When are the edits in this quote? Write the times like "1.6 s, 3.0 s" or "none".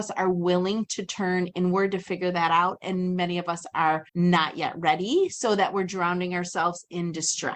4.1 s